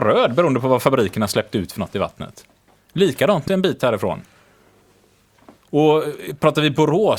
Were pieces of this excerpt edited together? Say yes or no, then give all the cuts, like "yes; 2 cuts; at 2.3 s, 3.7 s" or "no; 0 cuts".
yes; 1 cut; at 3.5 s